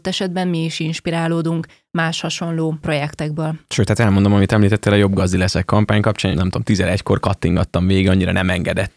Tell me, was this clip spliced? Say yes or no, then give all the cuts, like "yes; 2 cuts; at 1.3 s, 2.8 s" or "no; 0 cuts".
yes; 1 cut; at 6.3 s